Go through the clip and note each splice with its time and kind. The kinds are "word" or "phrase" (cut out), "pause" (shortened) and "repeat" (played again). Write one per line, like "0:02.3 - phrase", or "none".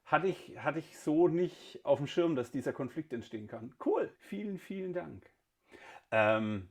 0:04.2 - pause